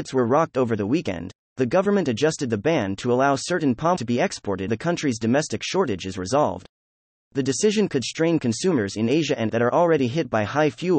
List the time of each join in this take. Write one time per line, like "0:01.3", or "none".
0:04.0
0:04.7
0:09.5